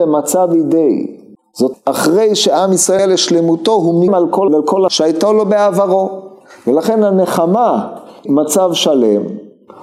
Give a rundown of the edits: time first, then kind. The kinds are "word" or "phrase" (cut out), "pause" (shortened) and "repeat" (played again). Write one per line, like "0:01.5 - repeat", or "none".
0:01.7 - word
0:03.0 - word
0:04.1 - word
0:04.5 - word
0:04.9 - word
0:08.3 - word